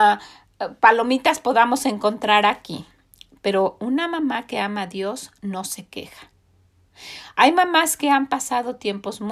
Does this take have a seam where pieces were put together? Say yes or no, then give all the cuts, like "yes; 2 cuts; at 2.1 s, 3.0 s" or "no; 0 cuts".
no; 0 cuts